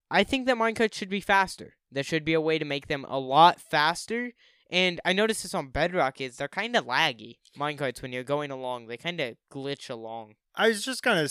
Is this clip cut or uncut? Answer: uncut